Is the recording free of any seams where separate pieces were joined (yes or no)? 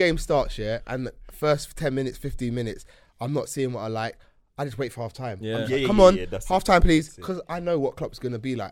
yes